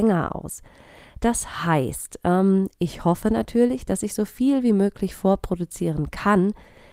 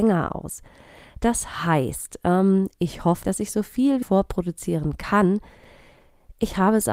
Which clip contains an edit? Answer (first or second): second